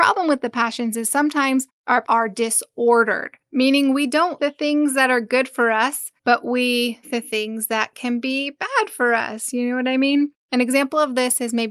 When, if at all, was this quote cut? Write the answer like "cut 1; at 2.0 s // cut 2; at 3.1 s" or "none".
cut 1; at 2.0 s // cut 2; at 4.4 s // cut 3; at 6.2 s // cut 4; at 7.0 s // cut 5; at 10.4 s